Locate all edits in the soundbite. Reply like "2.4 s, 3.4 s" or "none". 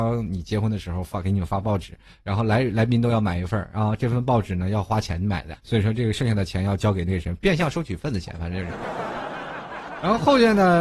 5.5 s

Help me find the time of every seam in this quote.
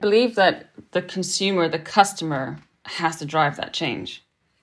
none

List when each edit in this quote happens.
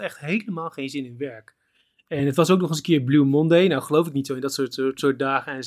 none

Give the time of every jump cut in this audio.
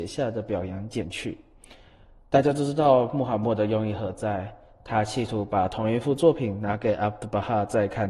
none

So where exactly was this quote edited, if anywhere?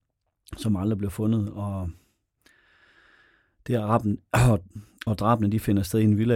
none

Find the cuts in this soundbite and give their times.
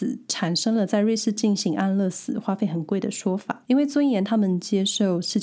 3.6 s

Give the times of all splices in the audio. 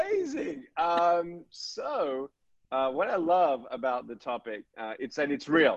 none

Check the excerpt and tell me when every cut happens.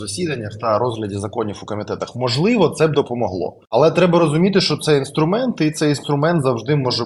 3.6 s

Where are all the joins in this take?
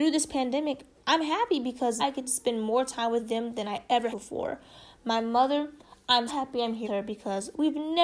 2.0 s, 4.1 s, 6.3 s, 6.8 s

